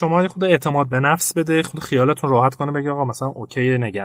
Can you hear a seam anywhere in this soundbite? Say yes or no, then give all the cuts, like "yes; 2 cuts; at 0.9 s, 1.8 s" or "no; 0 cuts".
no; 0 cuts